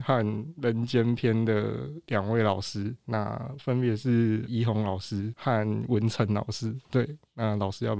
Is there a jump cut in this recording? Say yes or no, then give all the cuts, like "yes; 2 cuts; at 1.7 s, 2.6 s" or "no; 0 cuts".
yes; 1 cut; at 6.8 s